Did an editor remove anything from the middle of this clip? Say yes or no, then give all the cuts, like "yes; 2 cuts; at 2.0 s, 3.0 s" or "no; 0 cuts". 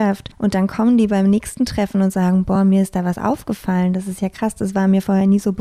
no; 0 cuts